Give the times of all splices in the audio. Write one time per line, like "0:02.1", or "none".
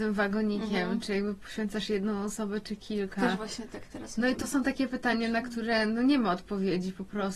none